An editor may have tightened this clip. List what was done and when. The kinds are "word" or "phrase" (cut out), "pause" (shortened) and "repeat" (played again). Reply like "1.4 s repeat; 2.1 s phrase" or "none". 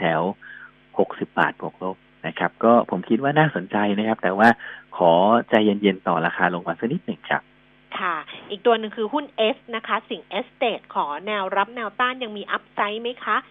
none